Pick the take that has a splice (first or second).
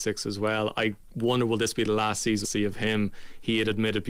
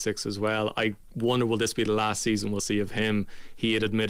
first